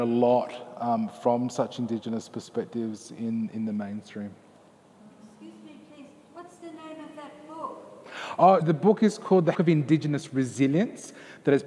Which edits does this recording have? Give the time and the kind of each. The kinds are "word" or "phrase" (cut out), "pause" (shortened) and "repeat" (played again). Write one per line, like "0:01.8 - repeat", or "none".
0:08.6 - word
0:09.5 - word